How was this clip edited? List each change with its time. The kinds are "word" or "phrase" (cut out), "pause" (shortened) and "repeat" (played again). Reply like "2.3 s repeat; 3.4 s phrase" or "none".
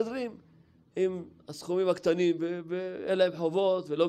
none